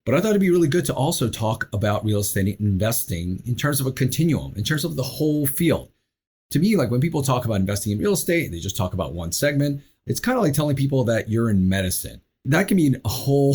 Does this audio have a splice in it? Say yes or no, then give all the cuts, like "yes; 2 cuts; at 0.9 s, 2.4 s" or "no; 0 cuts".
no; 0 cuts